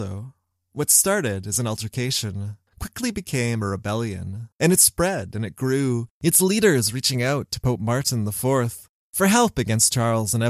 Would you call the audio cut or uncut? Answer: cut